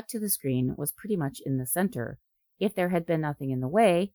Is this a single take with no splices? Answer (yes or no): yes